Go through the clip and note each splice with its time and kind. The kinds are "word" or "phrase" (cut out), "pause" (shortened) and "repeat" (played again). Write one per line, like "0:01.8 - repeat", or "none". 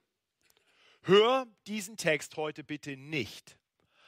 none